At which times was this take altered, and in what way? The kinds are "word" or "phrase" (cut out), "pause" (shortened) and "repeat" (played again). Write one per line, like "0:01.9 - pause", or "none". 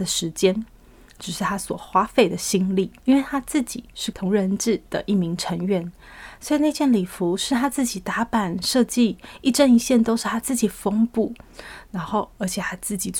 0:03.0 - pause
0:04.1 - word